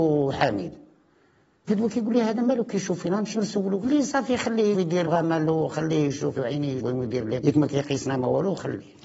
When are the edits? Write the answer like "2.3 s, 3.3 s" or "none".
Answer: 1.7 s, 3.3 s, 3.8 s, 4.7 s, 5.0 s, 6.3 s, 6.8 s, 7.4 s